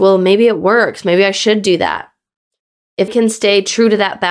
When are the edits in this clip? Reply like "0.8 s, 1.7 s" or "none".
3.1 s